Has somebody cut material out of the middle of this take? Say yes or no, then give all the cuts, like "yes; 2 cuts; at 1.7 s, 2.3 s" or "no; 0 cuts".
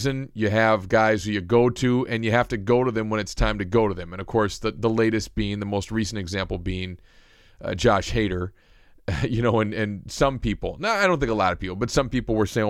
no; 0 cuts